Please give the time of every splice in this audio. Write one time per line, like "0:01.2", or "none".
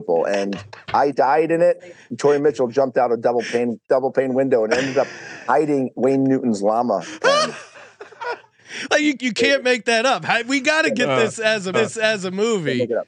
0:03.8
0:05.9
0:09.2
0:11.7